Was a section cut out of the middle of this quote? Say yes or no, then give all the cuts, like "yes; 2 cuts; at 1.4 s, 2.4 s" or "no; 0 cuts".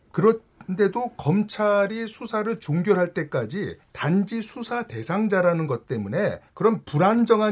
yes; 2 cuts; at 3.8 s, 6.5 s